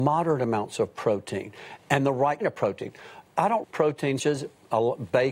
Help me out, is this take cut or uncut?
cut